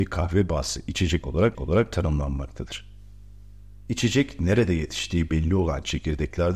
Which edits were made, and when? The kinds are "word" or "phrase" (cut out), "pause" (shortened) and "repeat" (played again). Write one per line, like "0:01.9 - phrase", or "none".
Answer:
0:01.5 - repeat